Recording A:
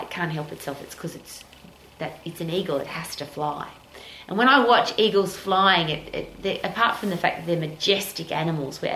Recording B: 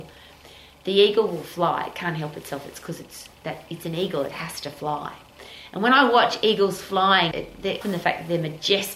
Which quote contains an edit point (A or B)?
B